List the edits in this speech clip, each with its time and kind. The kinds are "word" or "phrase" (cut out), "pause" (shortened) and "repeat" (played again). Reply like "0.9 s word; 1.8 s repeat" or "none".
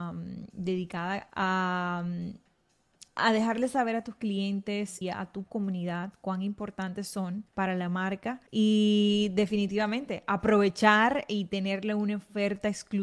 1.3 s phrase; 3.1 s pause; 5.0 s word; 7.5 s pause; 8.5 s pause